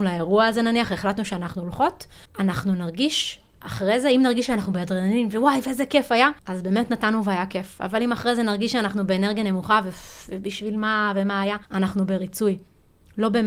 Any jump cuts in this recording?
yes; 3 cuts; at 2.2 s, 6.4 s, 11.6 s

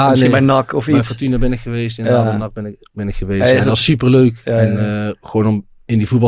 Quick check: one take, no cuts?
yes; 0 cuts

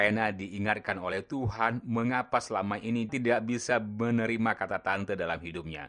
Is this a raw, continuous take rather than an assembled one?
no; 1 cut; at 3.1 s

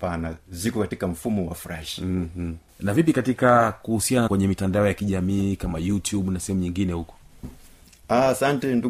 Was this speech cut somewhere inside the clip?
yes; 2 cuts; at 2.7 s, 4.3 s

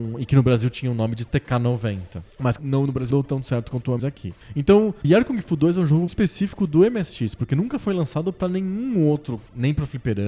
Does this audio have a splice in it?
yes; 5 cuts; at 2.6 s, 3.1 s, 4.0 s, 5.0 s, 6.1 s

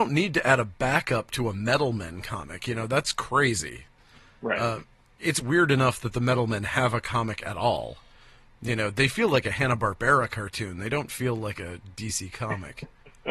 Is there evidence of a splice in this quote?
yes; 1 cut; at 5.2 s

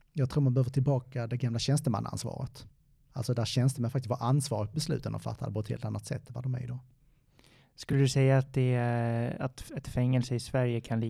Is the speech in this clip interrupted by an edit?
no; 0 cuts

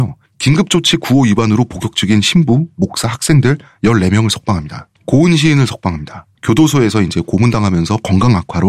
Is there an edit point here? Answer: yes; 2 cuts; at 5.0 s, 6.3 s

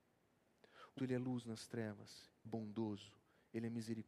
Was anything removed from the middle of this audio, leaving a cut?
yes; 2 cuts; at 1.0 s, 2.4 s

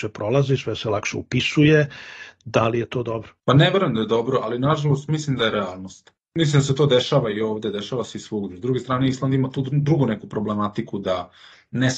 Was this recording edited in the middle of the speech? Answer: no; 0 cuts

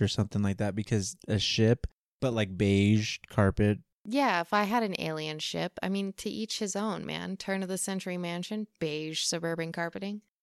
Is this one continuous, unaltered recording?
yes; 0 cuts

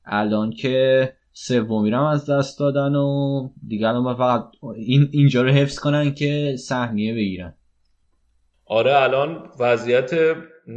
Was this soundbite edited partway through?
no; 0 cuts

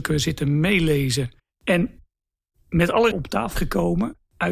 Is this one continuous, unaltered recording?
no; 3 cuts; at 1.4 s, 3.1 s, 3.6 s

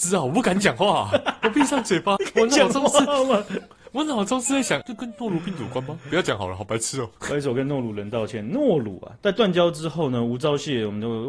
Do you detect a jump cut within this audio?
yes; 2 cuts; at 2.2 s, 4.8 s

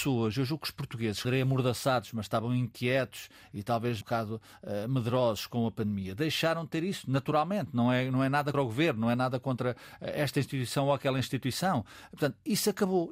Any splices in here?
yes; 3 cuts; at 1.2 s, 4.0 s, 8.5 s

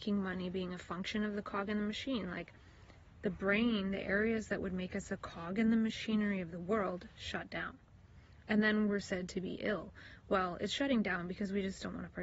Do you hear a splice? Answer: no; 0 cuts

